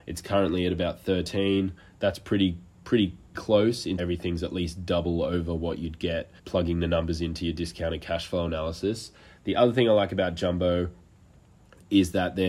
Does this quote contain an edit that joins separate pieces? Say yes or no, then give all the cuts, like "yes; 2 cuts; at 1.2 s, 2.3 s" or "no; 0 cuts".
yes; 3 cuts; at 3.3 s, 4.0 s, 6.4 s